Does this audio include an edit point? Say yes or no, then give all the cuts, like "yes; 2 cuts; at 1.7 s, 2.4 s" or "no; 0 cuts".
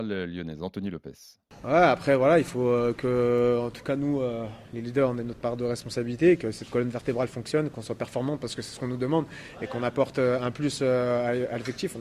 no; 0 cuts